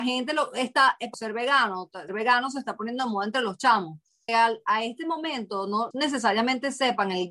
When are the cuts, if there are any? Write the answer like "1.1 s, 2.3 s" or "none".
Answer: 1.1 s, 2.1 s, 4.3 s, 5.9 s